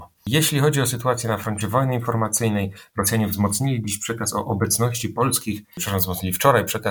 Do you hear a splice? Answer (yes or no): no